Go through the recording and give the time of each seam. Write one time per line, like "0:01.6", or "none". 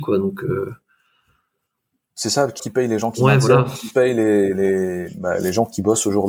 0:02.6
0:03.9